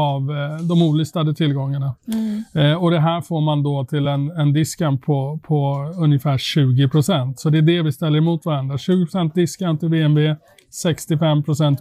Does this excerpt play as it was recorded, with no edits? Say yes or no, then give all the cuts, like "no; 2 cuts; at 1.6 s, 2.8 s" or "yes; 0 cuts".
yes; 0 cuts